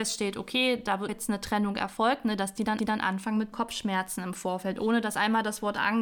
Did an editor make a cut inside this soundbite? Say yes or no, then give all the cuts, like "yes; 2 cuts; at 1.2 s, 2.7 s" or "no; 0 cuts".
yes; 3 cuts; at 1.1 s, 2.8 s, 3.5 s